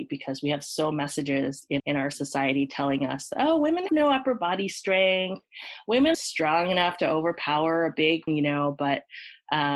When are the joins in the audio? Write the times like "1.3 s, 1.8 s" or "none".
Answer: 0.9 s, 1.8 s, 3.9 s, 6.1 s, 8.3 s